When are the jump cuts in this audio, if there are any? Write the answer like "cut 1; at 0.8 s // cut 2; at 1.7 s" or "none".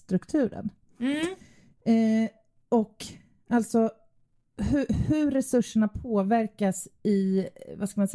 none